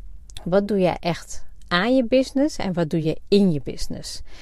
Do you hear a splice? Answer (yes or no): no